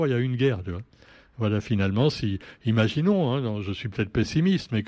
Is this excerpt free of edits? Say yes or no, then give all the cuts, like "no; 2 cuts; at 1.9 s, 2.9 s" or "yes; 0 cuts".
yes; 0 cuts